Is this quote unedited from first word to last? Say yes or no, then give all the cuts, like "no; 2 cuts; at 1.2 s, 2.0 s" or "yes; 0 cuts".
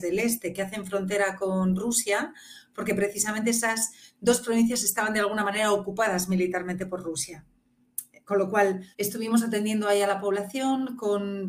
no; 1 cut; at 8.9 s